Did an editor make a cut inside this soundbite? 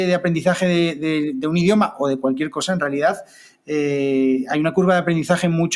no; 0 cuts

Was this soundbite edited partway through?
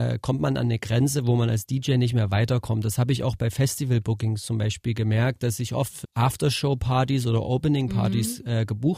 yes; 1 cut; at 6.0 s

